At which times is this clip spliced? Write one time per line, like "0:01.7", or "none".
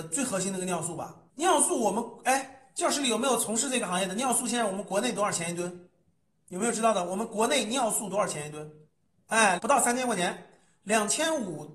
0:09.6